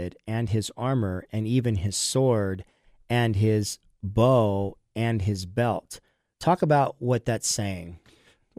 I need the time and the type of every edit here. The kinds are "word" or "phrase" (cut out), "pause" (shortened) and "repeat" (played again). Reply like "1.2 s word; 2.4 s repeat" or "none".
none